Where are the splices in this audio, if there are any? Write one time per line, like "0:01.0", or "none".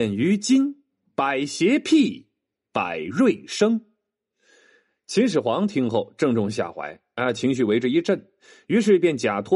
none